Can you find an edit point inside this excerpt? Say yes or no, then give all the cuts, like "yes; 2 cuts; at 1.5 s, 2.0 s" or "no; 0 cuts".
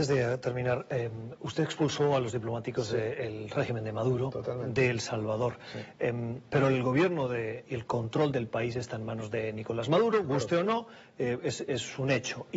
no; 0 cuts